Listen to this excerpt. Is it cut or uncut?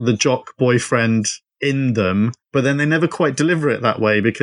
cut